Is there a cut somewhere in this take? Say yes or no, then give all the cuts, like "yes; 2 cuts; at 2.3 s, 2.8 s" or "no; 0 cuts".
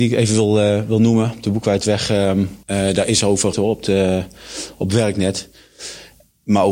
yes; 2 cuts; at 2.6 s, 3.5 s